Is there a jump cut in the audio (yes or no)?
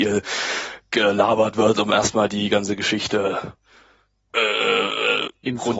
no